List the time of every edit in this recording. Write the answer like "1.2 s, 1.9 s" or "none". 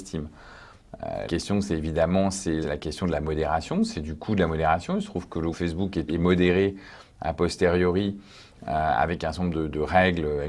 1.3 s, 2.6 s, 5.5 s, 6.1 s